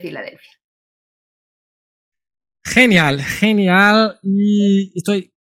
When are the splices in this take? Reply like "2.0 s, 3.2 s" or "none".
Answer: none